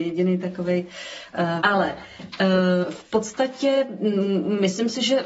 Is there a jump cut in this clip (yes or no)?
yes